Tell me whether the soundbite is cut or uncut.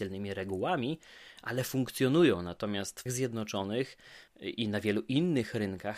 cut